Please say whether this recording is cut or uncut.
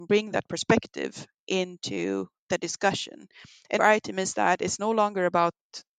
cut